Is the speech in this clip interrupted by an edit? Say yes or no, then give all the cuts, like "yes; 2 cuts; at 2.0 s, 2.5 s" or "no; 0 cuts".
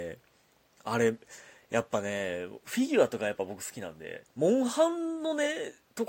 yes; 1 cut; at 4.3 s